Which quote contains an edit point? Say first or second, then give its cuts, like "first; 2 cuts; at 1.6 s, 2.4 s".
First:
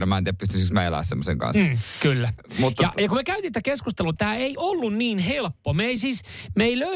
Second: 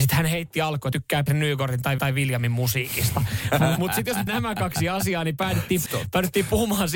second; 6 cuts; at 0.9 s, 1.3 s, 2.0 s, 3.8 s, 4.3 s, 5.9 s